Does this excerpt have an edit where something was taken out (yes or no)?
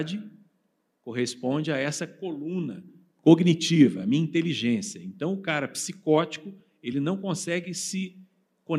no